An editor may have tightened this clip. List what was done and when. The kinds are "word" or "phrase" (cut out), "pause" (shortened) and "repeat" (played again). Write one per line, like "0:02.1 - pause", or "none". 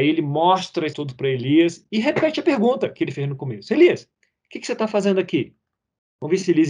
0:00.9 - word